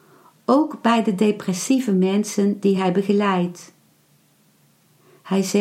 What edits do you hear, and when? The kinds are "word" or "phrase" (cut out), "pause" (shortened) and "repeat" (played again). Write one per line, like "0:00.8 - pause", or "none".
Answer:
none